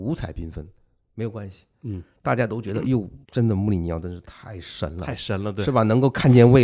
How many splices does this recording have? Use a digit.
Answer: 1